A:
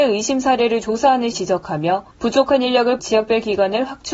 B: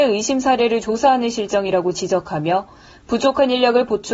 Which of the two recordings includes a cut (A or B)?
A